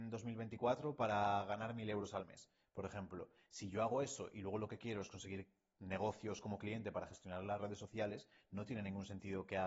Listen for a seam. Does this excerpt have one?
no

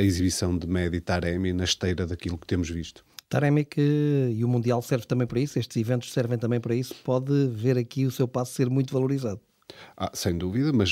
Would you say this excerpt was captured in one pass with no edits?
yes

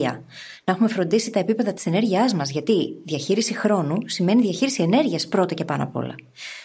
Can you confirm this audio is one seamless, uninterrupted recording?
yes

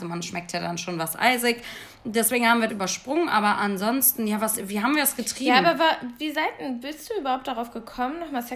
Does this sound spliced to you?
yes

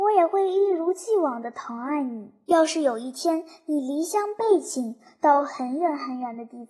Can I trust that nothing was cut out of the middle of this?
yes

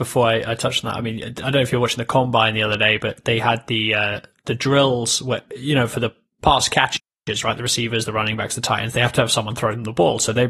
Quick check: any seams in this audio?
no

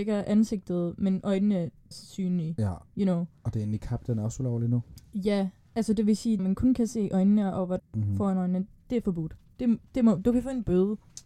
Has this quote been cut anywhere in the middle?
yes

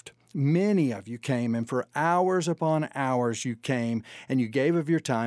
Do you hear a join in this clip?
no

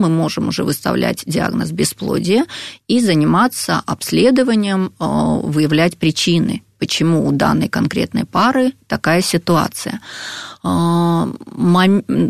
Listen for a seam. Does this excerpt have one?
no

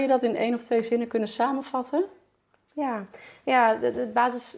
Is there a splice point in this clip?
no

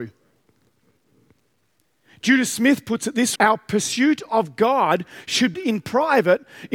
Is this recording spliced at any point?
yes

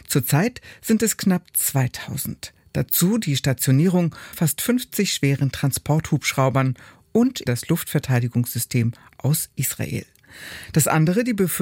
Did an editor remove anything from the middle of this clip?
yes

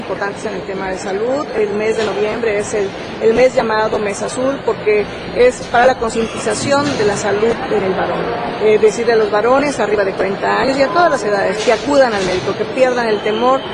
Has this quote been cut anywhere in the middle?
no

